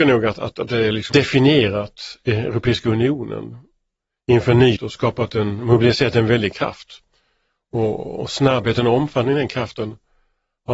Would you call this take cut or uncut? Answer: cut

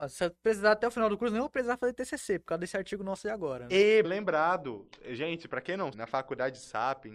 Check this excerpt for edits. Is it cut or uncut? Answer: cut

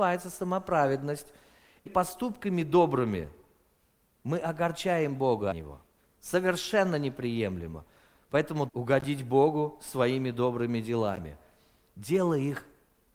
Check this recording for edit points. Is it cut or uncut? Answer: cut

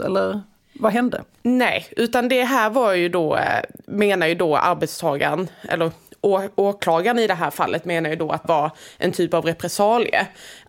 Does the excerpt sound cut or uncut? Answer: cut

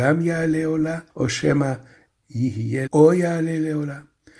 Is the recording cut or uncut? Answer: cut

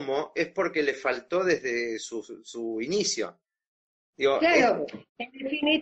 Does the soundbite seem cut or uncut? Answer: uncut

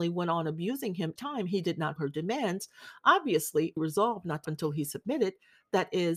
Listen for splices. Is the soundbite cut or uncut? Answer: cut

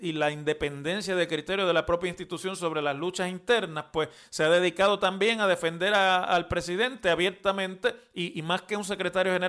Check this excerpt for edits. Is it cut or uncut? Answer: uncut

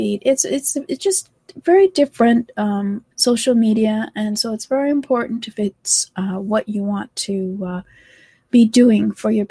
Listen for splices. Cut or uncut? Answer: cut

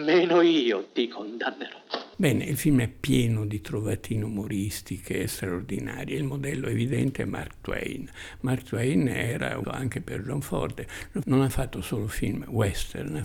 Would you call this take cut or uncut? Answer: cut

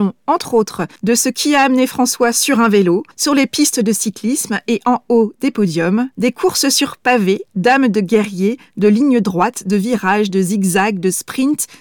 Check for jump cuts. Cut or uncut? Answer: cut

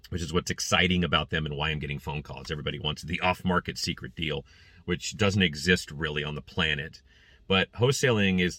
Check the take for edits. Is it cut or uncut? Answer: uncut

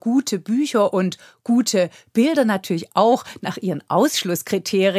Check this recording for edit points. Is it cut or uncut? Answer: uncut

